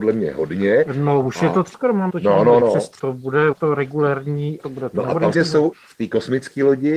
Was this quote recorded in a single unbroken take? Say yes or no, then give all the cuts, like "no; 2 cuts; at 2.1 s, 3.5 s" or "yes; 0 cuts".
no; 8 cuts; at 1.7 s, 2.1 s, 2.6 s, 3.0 s, 3.5 s, 4.6 s, 5.3 s, 5.7 s